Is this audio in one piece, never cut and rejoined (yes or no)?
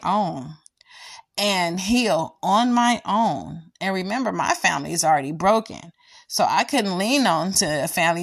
yes